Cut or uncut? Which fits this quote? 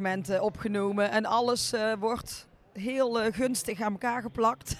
uncut